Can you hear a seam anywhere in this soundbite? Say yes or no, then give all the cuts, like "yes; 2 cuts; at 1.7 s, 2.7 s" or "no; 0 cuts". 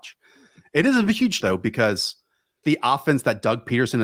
yes; 2 cuts; at 1.4 s, 2.6 s